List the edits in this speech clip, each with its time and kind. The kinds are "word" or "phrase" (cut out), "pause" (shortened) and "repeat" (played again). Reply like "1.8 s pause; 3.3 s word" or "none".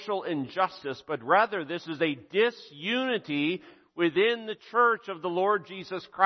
none